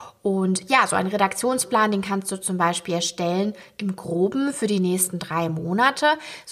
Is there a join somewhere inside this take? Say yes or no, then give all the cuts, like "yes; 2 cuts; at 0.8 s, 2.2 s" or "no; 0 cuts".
no; 0 cuts